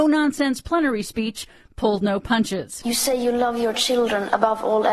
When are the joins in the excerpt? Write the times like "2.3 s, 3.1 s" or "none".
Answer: none